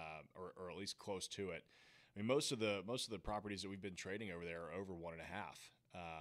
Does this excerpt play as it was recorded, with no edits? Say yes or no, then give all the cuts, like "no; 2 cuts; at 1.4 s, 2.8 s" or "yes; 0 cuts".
yes; 0 cuts